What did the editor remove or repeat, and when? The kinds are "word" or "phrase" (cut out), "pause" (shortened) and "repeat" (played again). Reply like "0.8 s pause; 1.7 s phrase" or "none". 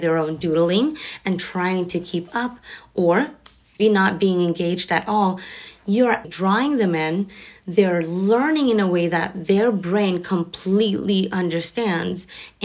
3.8 s word; 6.2 s word